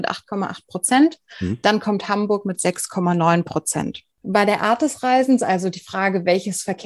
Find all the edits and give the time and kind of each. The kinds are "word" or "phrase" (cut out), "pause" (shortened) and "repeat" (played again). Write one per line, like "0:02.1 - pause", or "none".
0:04.1 - pause